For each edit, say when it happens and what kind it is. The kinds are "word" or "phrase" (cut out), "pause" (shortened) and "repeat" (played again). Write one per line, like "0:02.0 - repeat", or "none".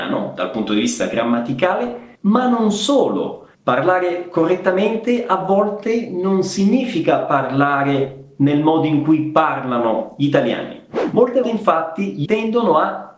0:02.1 - pause
0:03.5 - pause
0:11.4 - word
0:12.3 - word